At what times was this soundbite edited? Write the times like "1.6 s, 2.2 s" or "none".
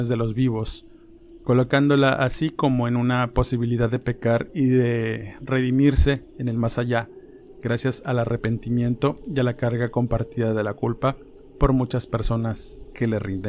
none